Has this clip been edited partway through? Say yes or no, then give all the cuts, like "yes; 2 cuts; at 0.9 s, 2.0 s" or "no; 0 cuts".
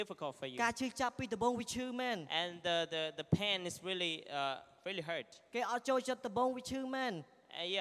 no; 0 cuts